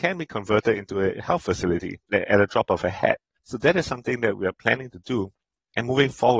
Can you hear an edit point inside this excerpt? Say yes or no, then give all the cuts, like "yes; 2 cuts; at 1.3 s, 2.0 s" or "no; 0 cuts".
yes; 2 cuts; at 2.0 s, 3.4 s